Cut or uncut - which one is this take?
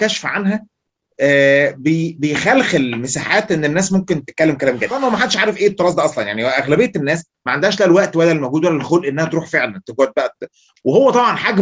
uncut